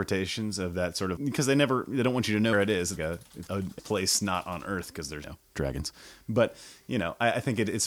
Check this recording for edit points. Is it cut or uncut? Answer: cut